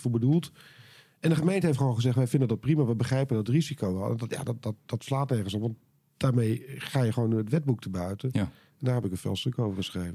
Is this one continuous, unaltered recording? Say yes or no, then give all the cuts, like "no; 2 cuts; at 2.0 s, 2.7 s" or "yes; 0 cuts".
yes; 0 cuts